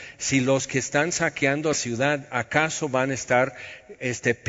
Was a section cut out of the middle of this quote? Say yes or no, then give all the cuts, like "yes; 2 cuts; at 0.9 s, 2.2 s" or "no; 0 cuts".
yes; 1 cut; at 1.7 s